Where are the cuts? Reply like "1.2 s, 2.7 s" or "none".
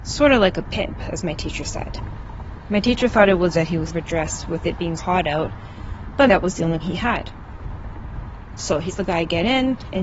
3.5 s, 3.9 s, 5.0 s, 6.3 s, 6.8 s, 8.9 s